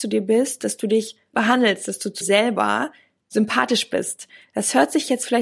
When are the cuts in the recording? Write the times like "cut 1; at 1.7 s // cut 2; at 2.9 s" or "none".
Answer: cut 1; at 1.3 s // cut 2; at 2.2 s